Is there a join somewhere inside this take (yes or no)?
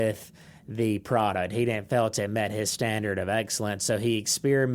no